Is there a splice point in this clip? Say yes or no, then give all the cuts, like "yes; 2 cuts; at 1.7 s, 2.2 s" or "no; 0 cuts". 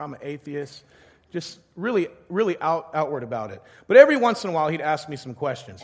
no; 0 cuts